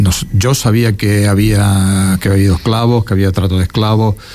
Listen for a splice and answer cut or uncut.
uncut